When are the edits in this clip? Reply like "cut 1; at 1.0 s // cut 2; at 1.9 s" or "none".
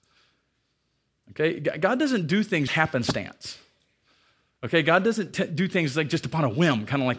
cut 1; at 2.7 s

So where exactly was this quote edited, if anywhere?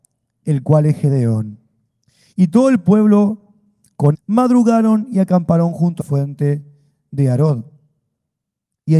cut 1; at 4.1 s // cut 2; at 6.0 s

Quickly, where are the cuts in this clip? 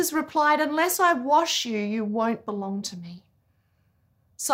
none

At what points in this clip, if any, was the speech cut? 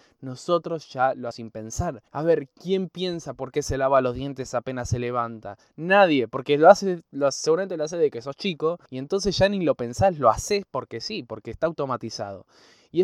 cut 1; at 1.3 s // cut 2; at 2.1 s // cut 3; at 8.9 s

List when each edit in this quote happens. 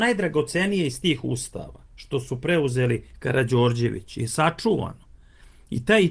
cut 1; at 1.9 s

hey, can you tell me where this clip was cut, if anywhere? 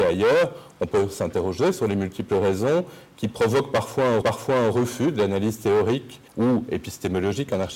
cut 1; at 4.2 s // cut 2; at 6.3 s

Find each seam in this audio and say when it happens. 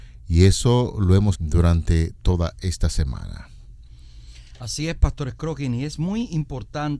cut 1; at 1.3 s

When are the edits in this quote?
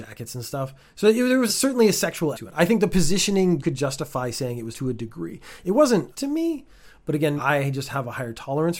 cut 1; at 1.5 s // cut 2; at 2.3 s // cut 3; at 3.6 s // cut 4; at 4.7 s // cut 5; at 6.1 s // cut 6; at 7.4 s

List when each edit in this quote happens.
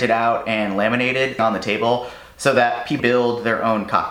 cut 1; at 1.4 s // cut 2; at 3.0 s

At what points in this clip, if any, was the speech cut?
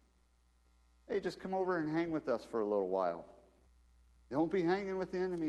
cut 1; at 3.7 s

